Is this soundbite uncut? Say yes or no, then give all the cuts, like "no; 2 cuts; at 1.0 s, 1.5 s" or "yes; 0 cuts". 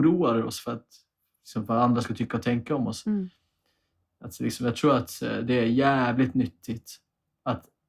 yes; 0 cuts